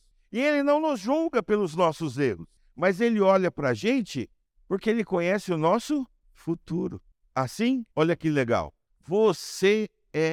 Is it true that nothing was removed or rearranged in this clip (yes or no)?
no